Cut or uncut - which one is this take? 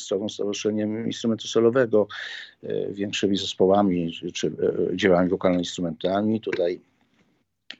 uncut